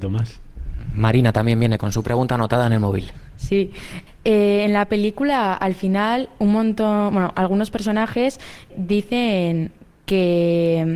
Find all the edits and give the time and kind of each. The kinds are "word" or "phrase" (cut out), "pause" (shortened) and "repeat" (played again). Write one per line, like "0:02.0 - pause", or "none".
0:01.8 - word